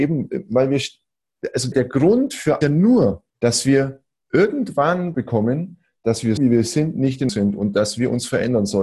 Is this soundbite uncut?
no; 6 cuts; at 1.7 s, 2.6 s, 3.3 s, 5.1 s, 6.4 s, 7.3 s

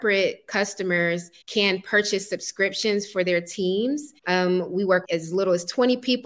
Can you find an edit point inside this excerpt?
yes; 3 cuts; at 1.4 s, 4.2 s, 5.0 s

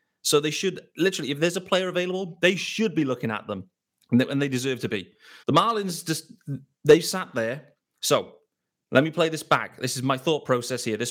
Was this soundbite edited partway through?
yes; 2 cuts; at 3.9 s, 5.4 s

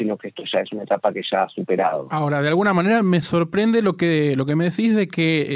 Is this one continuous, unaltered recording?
yes; 0 cuts

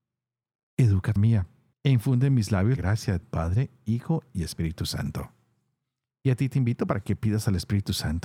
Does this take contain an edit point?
yes; 4 cuts; at 1.2 s, 1.7 s, 2.8 s, 3.2 s

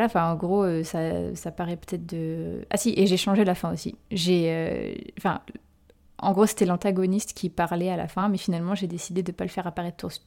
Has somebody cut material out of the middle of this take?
no; 0 cuts

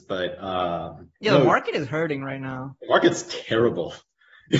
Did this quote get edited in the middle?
yes; 1 cut; at 1.1 s

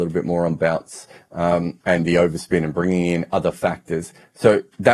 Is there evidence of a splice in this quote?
yes; 1 cut; at 1.8 s

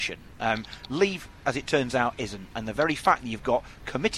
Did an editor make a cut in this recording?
no; 0 cuts

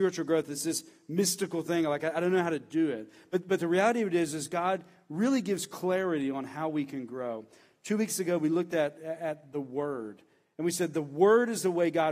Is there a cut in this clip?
no; 0 cuts

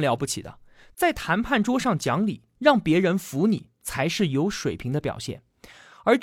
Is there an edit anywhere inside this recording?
no; 0 cuts

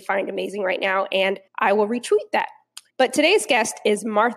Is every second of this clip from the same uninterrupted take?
no; 2 cuts; at 1.5 s, 2.9 s

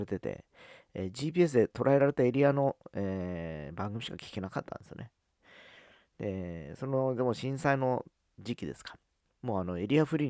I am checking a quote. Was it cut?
no; 0 cuts

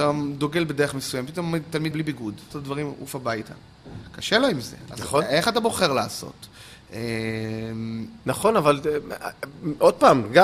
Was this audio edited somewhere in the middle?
yes; 2 cuts; at 1.9 s, 2.5 s

